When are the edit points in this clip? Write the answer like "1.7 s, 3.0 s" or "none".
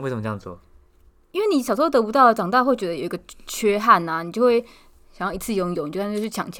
none